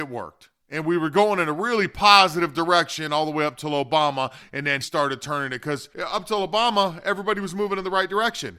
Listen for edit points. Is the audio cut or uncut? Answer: cut